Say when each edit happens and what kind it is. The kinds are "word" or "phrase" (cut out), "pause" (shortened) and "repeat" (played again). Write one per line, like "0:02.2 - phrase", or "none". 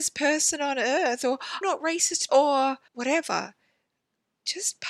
0:01.6 - word
0:02.3 - word
0:02.9 - pause